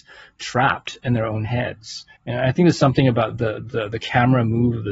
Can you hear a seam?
yes; 1 cut; at 2.2 s

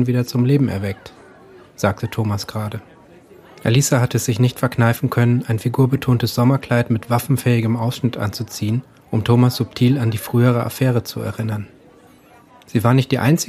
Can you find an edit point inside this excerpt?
no; 0 cuts

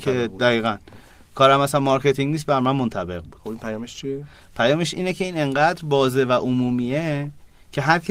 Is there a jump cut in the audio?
no; 0 cuts

